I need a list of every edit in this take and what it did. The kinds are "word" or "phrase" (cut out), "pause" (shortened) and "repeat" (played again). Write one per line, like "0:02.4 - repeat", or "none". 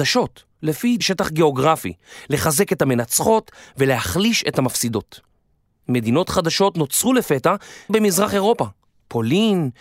0:01.0 - word
0:07.9 - word

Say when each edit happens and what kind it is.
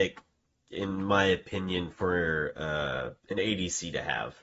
0:03.2 - pause

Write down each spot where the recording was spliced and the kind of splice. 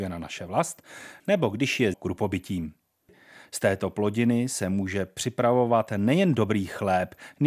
0:01.9 - word

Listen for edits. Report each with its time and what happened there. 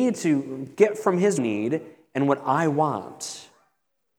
0:01.4 - phrase

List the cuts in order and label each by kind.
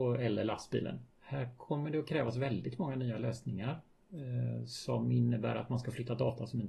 0:01.1 - pause

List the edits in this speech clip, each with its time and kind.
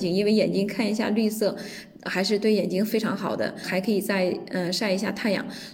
0:03.6 - phrase

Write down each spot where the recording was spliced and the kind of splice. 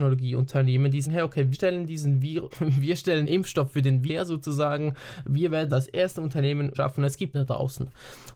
0:01.0 - word
0:01.5 - word
0:02.5 - word
0:03.2 - word
0:04.1 - word
0:05.7 - word
0:06.7 - word
0:07.3 - word

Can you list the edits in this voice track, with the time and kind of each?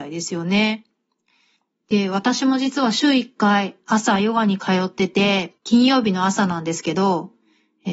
0:05.6 - pause

